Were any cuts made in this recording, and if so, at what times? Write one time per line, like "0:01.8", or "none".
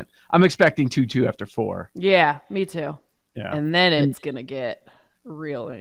none